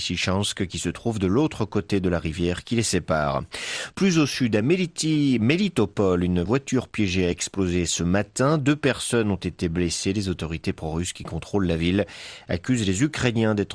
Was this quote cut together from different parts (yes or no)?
no